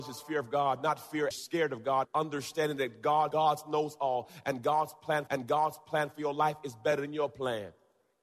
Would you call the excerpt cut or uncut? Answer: cut